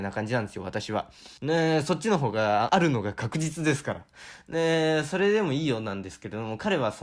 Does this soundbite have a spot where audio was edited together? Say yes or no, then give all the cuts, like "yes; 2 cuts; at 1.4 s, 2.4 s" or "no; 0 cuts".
yes; 2 cuts; at 1.4 s, 2.7 s